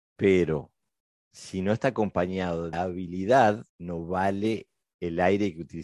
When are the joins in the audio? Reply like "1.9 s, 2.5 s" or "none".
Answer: 2.7 s, 3.7 s